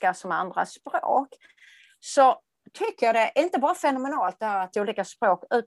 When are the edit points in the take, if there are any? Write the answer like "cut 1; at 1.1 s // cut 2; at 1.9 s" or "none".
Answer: cut 1; at 4.7 s